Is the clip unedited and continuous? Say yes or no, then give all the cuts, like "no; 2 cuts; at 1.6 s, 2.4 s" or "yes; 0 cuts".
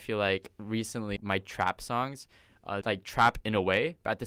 no; 2 cuts; at 1.2 s, 2.8 s